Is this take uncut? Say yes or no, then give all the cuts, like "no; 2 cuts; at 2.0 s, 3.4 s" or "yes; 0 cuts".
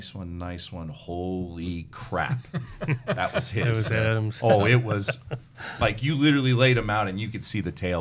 yes; 0 cuts